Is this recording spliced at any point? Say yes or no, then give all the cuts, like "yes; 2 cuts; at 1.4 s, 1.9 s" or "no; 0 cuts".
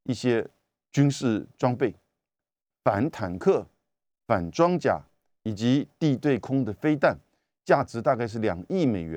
no; 0 cuts